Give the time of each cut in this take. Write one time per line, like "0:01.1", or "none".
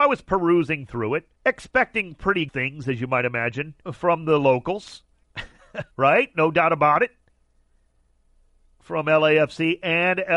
0:01.3
0:02.5
0:03.8
0:05.9

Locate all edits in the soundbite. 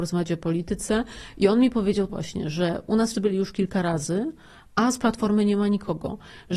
0:02.1
0:03.1

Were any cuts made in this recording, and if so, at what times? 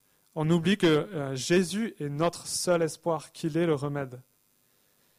none

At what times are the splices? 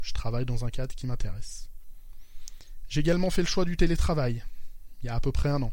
none

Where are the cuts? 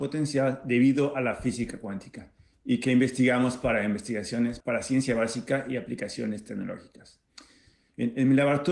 0:04.6

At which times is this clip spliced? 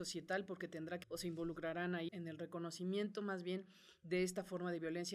0:01.0
0:02.1

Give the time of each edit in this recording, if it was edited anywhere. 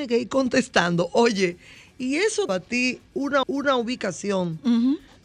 0:02.5
0:03.4

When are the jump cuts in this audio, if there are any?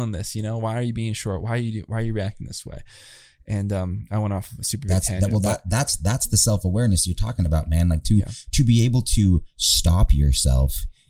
none

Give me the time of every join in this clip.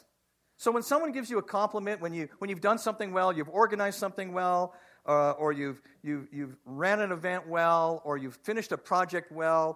none

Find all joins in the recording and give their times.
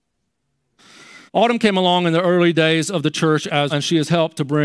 0:01.3
0:03.7

